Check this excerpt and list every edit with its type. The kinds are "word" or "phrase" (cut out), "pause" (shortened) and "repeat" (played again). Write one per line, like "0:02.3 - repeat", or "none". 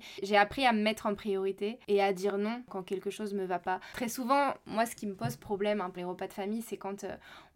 0:06.0 - word